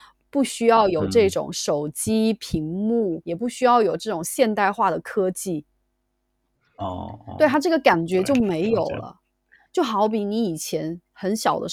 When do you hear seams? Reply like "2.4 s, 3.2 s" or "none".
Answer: 3.2 s

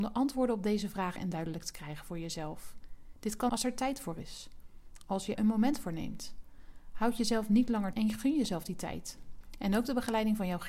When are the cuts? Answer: 1.2 s, 3.5 s, 5.3 s, 7.9 s

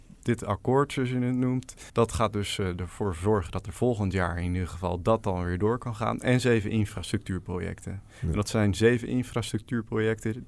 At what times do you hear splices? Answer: 1.9 s

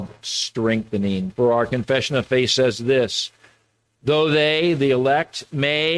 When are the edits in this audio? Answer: none

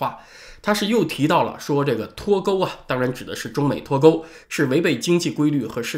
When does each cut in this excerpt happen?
4.4 s

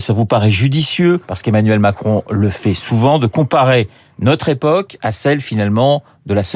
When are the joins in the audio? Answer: 1.2 s

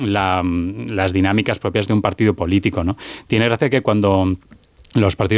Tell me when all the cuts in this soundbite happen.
none

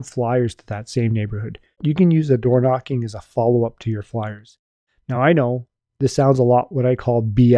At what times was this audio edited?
none

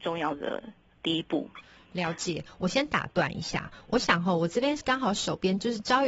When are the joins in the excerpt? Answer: none

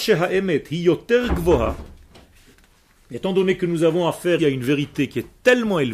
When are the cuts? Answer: 4.4 s

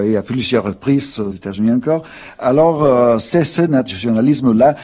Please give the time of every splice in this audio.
1.3 s

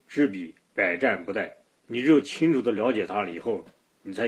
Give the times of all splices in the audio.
1.6 s

